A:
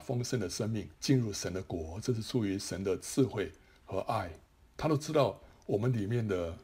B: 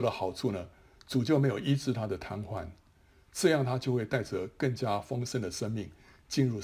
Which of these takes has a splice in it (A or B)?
A